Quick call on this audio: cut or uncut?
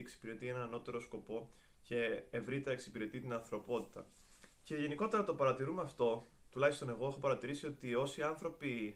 cut